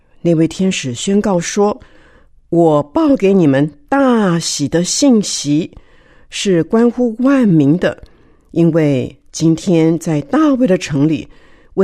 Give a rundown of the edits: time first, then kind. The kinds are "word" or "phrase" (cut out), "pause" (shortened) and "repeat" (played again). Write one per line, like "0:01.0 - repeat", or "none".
none